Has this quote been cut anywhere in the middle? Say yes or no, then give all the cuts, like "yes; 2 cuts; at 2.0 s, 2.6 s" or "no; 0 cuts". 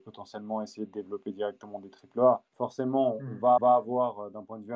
yes; 2 cuts; at 2.5 s, 3.6 s